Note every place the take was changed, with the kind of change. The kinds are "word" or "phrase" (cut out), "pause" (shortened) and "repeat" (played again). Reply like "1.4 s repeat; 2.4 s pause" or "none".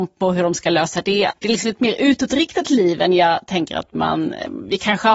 none